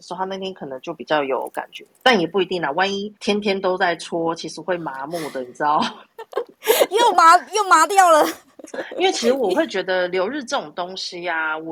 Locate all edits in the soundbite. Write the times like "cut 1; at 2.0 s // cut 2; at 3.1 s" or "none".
cut 1; at 3.2 s

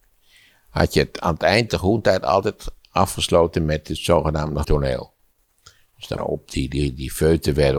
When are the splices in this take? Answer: cut 1; at 1.7 s // cut 2; at 4.6 s // cut 3; at 6.2 s

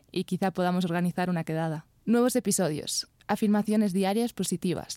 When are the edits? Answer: cut 1; at 2.0 s

